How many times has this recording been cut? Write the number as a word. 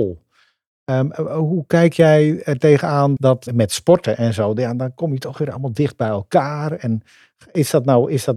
two